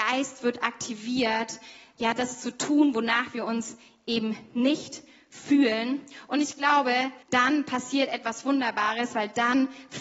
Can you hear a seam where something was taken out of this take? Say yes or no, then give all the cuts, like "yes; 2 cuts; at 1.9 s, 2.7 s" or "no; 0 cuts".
yes; 1 cut; at 7.2 s